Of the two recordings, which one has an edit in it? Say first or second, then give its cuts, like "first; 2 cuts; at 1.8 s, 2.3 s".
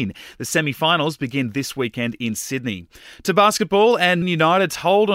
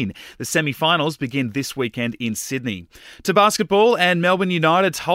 first; 1 cut; at 4.2 s